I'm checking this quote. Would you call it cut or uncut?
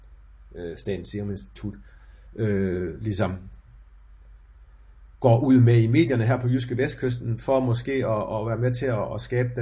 uncut